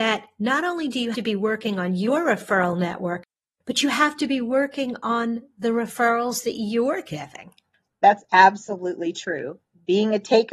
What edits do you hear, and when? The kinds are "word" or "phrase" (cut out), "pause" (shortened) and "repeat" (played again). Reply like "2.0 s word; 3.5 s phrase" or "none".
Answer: 1.1 s word